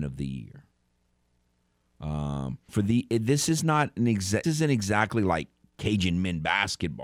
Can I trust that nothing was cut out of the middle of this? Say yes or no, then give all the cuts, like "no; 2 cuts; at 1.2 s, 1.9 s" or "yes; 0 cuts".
no; 2 cuts; at 2.7 s, 4.4 s